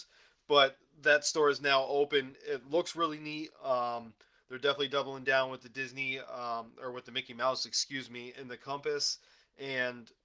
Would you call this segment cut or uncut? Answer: uncut